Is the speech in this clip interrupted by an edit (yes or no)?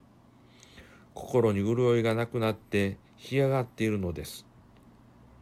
yes